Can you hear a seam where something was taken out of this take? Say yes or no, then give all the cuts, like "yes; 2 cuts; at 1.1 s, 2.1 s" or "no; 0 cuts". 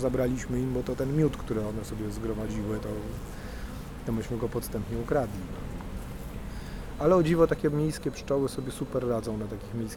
no; 0 cuts